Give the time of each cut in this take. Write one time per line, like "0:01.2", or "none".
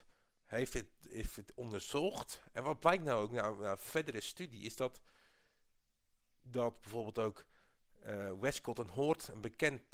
none